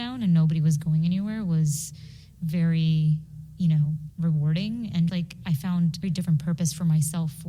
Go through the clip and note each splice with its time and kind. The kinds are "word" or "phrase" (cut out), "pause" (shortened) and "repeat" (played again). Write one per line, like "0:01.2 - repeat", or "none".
0:04.1 - word
0:05.1 - word
0:06.0 - word